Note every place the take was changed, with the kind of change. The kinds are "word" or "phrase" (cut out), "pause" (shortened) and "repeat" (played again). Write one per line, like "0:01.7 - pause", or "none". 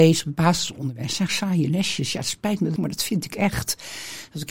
0:01.3 - word
0:02.8 - phrase